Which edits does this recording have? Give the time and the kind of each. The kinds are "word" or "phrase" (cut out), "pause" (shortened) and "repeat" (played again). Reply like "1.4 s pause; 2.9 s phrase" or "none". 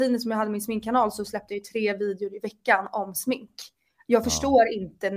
none